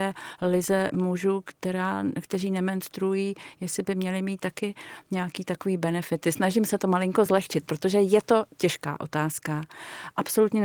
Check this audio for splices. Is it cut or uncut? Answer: uncut